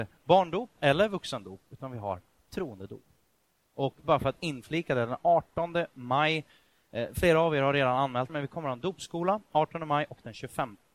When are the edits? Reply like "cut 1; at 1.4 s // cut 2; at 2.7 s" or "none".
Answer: cut 1; at 8.3 s